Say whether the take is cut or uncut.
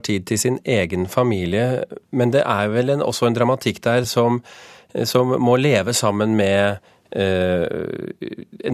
uncut